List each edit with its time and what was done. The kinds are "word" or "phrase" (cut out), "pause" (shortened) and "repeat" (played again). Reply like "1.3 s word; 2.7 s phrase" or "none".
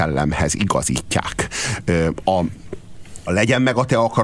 3.3 s word